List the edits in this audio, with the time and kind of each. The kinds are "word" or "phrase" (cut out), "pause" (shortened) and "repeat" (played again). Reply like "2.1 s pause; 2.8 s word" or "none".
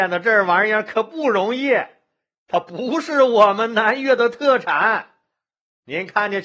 none

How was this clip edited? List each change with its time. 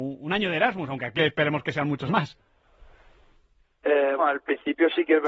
1.2 s word; 2.1 s word; 4.2 s word

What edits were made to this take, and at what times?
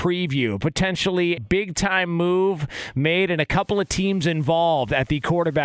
1.4 s word

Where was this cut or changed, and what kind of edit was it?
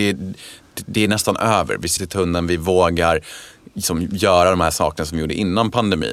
2.0 s word

